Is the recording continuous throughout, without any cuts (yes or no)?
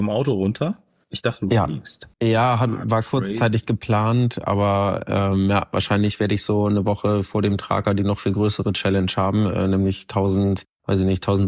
no